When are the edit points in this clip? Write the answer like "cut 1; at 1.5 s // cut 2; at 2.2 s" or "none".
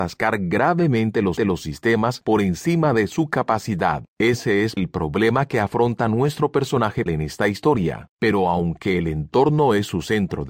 cut 1; at 1.4 s // cut 2; at 4.1 s // cut 3; at 4.8 s // cut 4; at 7.1 s // cut 5; at 8.1 s